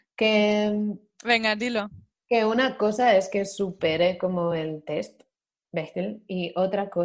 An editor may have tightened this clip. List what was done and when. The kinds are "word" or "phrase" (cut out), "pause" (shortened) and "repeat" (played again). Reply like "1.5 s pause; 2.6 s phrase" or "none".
none